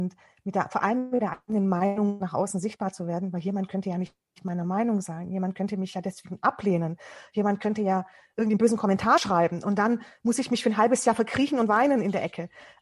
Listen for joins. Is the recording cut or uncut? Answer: uncut